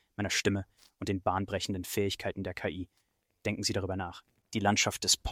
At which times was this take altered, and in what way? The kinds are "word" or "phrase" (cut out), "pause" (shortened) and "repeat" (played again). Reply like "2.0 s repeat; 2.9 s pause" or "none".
none